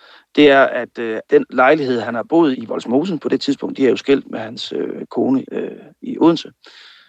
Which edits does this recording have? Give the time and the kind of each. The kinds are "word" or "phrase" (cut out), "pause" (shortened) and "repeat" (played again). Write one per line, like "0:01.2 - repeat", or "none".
0:01.2 - pause
0:02.5 - word
0:05.4 - word